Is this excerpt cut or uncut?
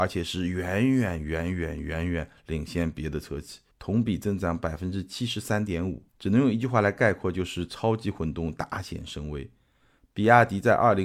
cut